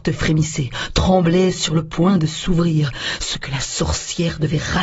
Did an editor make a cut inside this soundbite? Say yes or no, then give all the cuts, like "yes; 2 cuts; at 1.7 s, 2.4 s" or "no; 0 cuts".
no; 0 cuts